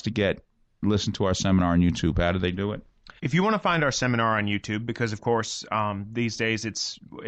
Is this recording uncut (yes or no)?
no